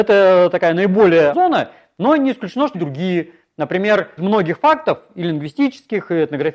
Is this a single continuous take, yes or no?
no